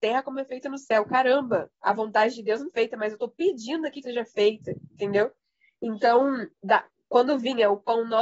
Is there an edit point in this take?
yes; 4 cuts; at 1.7 s, 2.7 s, 4.0 s, 6.6 s

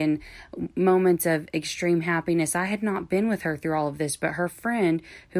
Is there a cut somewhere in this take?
no; 0 cuts

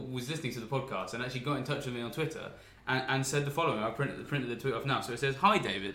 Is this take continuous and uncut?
yes; 0 cuts

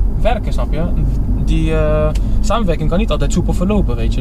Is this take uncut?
yes; 0 cuts

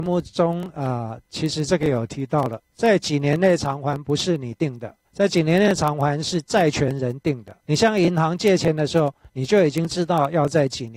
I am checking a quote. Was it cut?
yes; 3 cuts; at 2.7 s, 5.0 s, 7.6 s

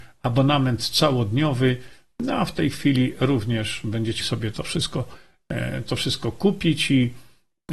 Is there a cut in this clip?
yes; 1 cut; at 4.2 s

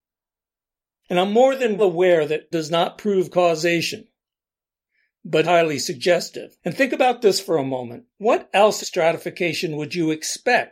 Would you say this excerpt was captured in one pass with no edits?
no; 6 cuts; at 1.8 s, 2.5 s, 5.4 s, 6.6 s, 8.1 s, 8.8 s

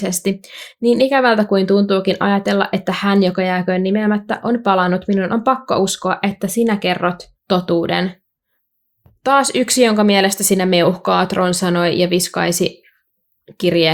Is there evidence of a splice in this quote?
yes; 1 cut; at 7.4 s

